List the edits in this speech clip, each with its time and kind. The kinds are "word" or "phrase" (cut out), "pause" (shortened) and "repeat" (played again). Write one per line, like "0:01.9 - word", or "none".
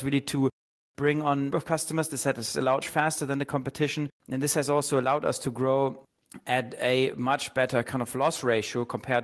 0:01.5 - phrase
0:02.8 - phrase
0:04.2 - pause